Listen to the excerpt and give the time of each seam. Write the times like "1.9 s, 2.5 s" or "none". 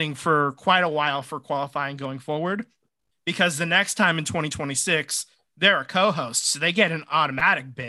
none